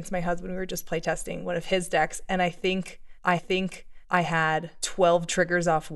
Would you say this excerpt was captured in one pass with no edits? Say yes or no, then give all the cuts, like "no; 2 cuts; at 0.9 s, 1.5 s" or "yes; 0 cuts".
no; 1 cut; at 3.4 s